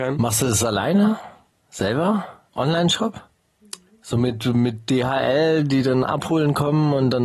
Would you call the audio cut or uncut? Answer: uncut